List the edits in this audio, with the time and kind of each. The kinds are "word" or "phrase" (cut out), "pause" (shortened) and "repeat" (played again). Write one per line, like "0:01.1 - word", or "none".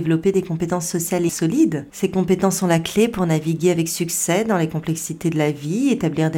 0:01.3 - word

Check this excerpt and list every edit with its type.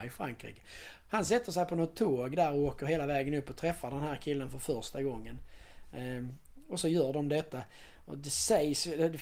none

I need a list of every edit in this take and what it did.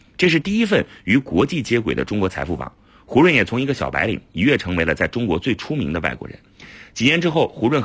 none

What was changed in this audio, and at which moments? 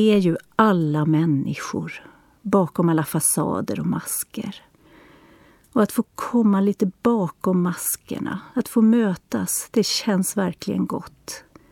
none

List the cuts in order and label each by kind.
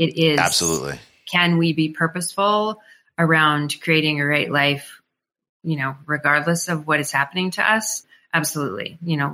none

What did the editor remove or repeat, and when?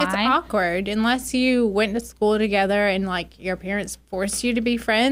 none

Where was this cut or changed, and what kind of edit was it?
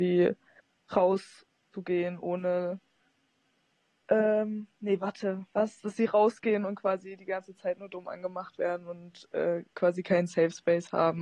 none

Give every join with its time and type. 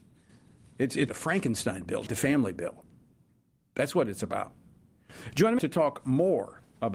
0:01.1 - word
0:02.1 - word
0:05.6 - word

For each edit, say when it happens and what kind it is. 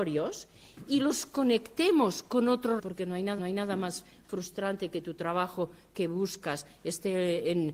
0:02.8 - word
0:03.4 - repeat

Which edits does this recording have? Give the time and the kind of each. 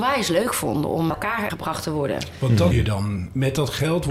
0:01.1 - word
0:01.5 - word
0:02.7 - word

